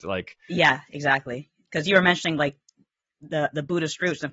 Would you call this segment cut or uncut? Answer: uncut